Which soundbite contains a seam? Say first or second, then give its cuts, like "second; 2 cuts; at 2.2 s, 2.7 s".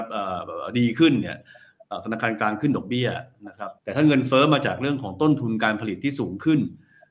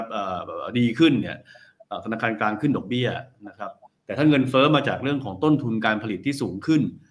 first; 1 cut; at 3.8 s